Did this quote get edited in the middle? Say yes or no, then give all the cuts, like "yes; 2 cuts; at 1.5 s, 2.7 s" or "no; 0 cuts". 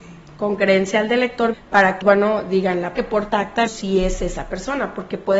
yes; 5 cuts; at 1.5 s, 2.0 s, 3.0 s, 3.3 s, 3.7 s